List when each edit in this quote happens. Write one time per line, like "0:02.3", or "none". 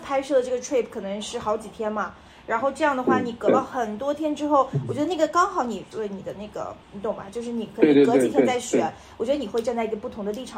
0:05.9
0:06.8